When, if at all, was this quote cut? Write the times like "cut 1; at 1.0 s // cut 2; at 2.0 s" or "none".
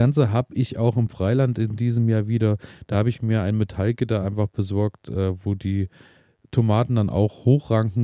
none